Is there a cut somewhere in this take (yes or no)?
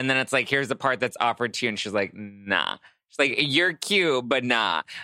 no